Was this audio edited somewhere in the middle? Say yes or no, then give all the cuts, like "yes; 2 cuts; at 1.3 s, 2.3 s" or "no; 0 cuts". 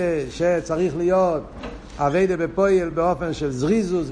no; 0 cuts